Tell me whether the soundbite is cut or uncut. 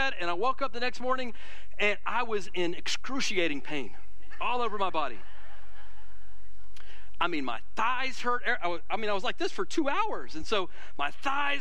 uncut